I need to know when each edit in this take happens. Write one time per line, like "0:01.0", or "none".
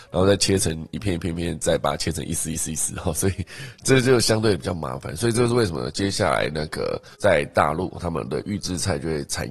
0:07.1